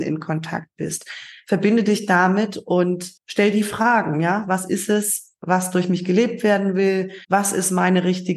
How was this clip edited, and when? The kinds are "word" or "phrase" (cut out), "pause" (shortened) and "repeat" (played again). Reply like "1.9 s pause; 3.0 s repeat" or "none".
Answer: 3.2 s pause; 7.2 s pause